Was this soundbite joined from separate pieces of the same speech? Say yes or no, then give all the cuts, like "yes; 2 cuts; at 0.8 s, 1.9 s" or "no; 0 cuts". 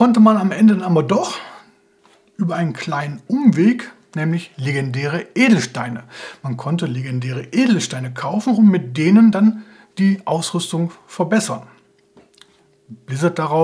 no; 0 cuts